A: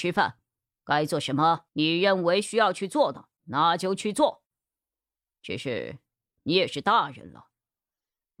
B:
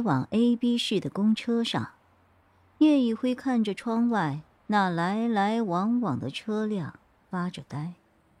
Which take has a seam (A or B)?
A